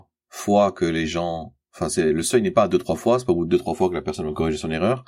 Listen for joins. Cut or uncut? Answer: uncut